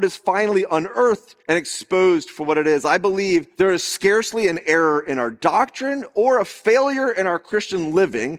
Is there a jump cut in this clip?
yes; 2 cuts; at 1.4 s, 3.5 s

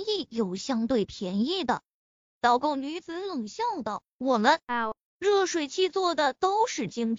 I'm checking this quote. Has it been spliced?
no; 0 cuts

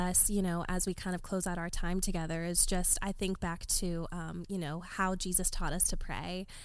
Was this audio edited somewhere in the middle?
no; 0 cuts

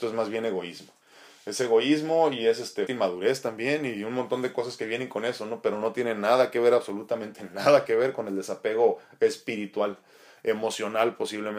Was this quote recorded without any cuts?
no; 1 cut; at 2.9 s

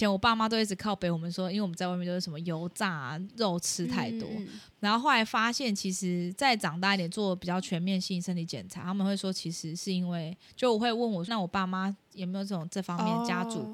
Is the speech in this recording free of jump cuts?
no; 1 cut; at 11.3 s

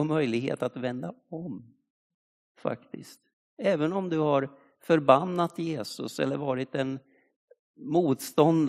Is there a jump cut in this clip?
no; 0 cuts

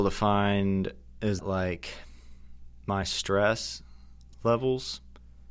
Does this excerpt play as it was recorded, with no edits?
no; 1 cut; at 1.4 s

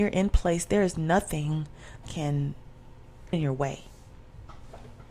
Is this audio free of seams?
no; 2 cuts; at 2.0 s, 3.3 s

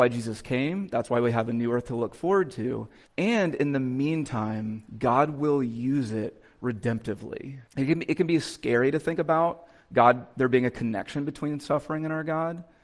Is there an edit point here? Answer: yes; 3 cuts; at 3.1 s, 4.9 s, 7.7 s

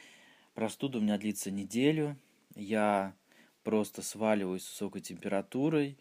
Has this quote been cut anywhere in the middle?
no; 0 cuts

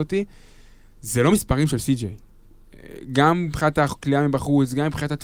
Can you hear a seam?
no; 0 cuts

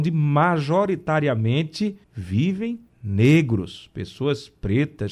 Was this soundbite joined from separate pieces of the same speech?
yes; 1 cut; at 2.0 s

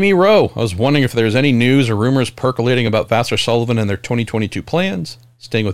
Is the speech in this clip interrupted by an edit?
no; 0 cuts

